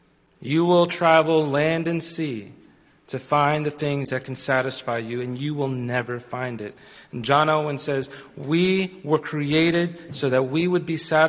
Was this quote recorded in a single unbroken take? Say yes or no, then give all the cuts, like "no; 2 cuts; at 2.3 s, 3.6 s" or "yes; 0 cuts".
yes; 0 cuts